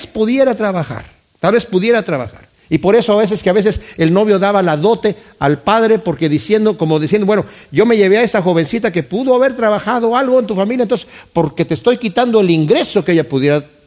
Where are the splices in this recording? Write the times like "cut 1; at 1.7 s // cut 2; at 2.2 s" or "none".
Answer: none